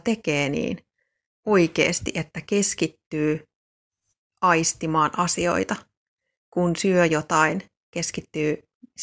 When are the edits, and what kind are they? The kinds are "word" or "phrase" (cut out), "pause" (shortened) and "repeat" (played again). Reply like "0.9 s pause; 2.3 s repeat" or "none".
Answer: none